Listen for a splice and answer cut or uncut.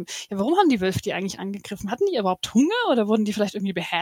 uncut